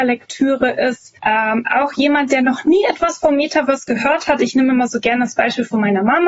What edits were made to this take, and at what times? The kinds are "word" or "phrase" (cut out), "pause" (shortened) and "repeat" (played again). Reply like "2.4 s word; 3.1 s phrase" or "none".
none